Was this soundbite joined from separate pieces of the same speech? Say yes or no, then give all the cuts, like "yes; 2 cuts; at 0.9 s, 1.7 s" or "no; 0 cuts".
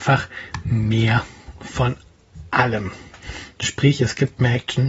no; 0 cuts